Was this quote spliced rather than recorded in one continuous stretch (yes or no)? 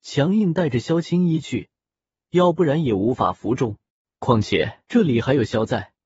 yes